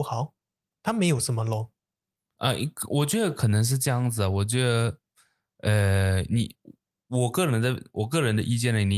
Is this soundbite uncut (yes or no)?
yes